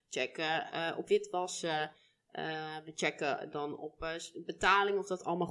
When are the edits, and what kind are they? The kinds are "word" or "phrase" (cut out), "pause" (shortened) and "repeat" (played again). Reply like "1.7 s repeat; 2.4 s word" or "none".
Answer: 1.1 s word